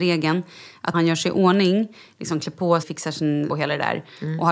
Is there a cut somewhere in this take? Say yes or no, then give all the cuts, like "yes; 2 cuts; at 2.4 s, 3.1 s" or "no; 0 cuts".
yes; 3 cuts; at 0.9 s, 2.8 s, 3.5 s